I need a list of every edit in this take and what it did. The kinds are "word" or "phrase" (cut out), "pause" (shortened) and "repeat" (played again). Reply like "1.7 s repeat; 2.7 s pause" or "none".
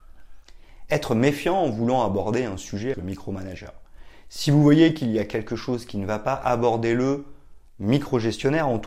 2.9 s word